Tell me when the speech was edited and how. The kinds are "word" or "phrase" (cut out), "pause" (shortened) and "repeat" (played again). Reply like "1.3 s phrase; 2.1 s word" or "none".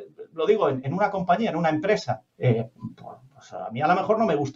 2.3 s pause